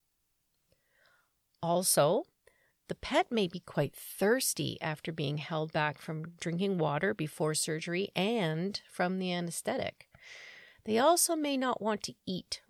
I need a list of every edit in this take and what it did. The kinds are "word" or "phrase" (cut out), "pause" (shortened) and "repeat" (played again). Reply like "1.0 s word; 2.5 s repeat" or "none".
none